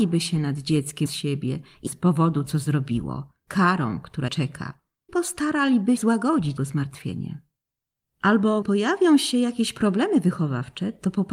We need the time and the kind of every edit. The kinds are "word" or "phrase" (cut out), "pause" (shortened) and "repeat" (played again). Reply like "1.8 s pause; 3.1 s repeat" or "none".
1.1 s word; 1.9 s word; 2.4 s word; 3.5 s word; 4.3 s word; 5.1 s word; 6.0 s word; 6.6 s word; 8.6 s word

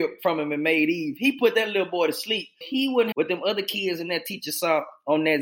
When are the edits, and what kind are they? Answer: 2.6 s word; 3.1 s phrase

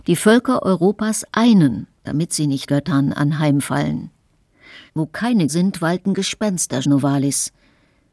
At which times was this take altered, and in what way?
1.9 s pause; 2.7 s word; 4.9 s pause; 5.5 s word; 6.8 s word

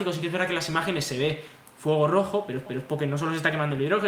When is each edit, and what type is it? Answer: 2.7 s repeat

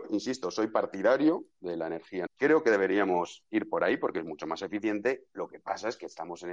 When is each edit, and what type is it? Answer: 2.3 s word

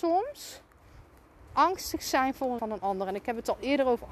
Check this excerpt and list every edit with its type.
2.6 s word

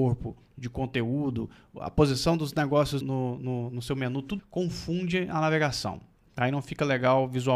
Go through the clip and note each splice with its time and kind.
3.0 s word; 4.4 s word

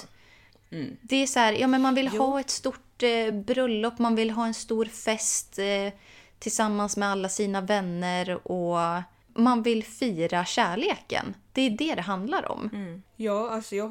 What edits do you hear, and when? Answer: none

